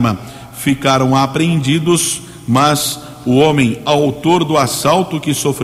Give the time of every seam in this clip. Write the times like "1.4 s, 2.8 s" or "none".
none